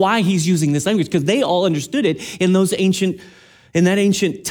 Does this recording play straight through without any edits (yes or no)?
yes